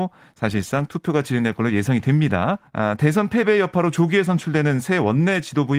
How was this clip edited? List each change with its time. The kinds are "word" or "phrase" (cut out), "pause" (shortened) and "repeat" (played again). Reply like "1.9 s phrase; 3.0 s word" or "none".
2.7 s pause